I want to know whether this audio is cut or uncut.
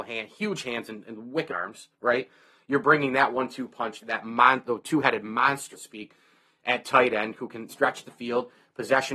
cut